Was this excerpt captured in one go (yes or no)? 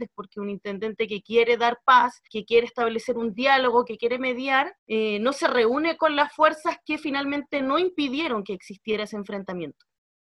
no